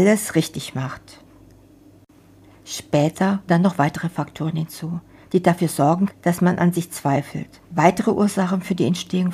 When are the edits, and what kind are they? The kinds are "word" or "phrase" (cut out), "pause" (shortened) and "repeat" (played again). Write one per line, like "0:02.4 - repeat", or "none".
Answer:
0:03.5 - word
0:06.1 - word
0:07.6 - pause